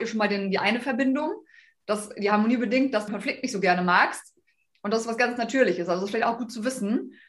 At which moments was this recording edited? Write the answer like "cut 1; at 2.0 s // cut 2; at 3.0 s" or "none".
cut 1; at 3.1 s